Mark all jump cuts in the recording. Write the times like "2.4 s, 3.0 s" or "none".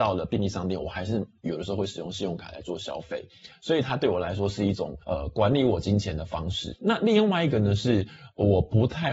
5.0 s